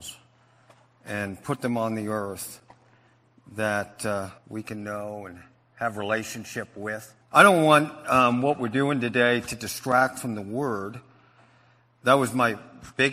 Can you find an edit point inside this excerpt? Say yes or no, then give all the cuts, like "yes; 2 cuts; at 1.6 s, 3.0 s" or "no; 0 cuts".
yes; 2 cuts; at 4.4 s, 7.2 s